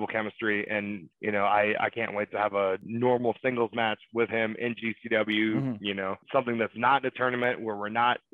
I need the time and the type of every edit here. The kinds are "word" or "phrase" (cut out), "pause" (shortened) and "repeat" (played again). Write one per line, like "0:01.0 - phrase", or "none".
0:01.1 - pause
0:06.2 - pause